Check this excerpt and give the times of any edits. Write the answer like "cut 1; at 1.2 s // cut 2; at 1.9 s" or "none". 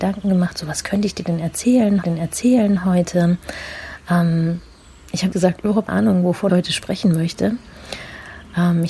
cut 1; at 2.0 s // cut 2; at 5.3 s // cut 3; at 5.9 s // cut 4; at 6.5 s